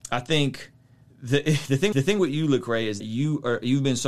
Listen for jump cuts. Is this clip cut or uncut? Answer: cut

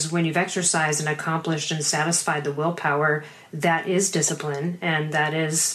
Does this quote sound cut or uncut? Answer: uncut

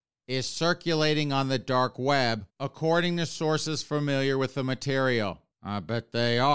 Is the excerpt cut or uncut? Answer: cut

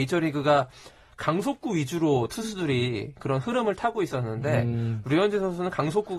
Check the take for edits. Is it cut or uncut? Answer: uncut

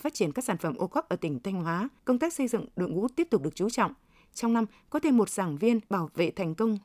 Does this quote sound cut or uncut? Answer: cut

